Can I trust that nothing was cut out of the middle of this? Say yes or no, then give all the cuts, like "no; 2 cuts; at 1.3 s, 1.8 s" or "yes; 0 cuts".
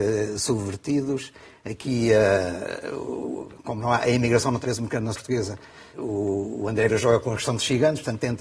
no; 4 cuts; at 4.6 s, 5.1 s, 5.9 s, 6.9 s